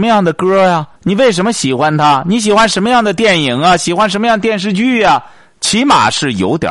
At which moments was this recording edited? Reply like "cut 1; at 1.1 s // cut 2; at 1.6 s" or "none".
cut 1; at 1.0 s

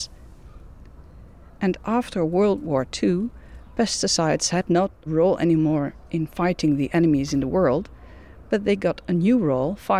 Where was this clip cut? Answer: cut 1; at 5.1 s

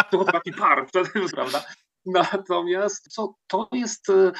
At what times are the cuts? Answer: cut 1; at 1.3 s // cut 2; at 3.1 s

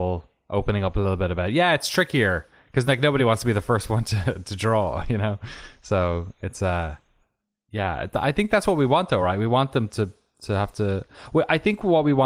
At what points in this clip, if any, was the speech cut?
none

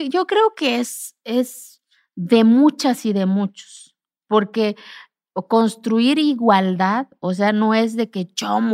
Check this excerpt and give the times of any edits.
none

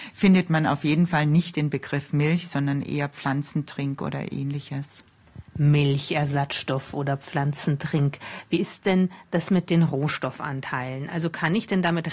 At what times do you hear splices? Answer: cut 1; at 5.5 s

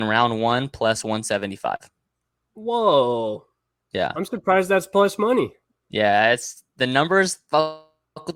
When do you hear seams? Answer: none

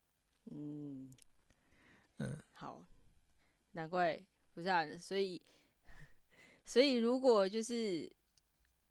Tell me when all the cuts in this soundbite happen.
none

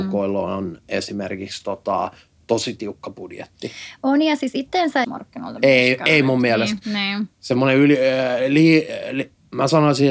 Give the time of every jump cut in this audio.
cut 1; at 5.0 s

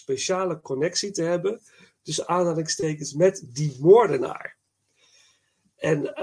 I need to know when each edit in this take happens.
none

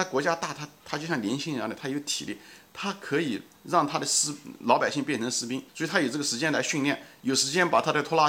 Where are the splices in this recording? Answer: cut 1; at 5.7 s

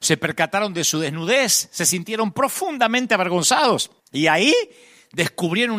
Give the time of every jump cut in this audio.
cut 1; at 4.0 s

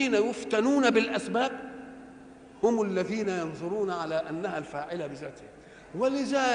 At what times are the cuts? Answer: none

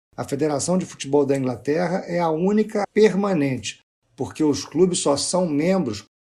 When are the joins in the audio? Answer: cut 1; at 2.8 s

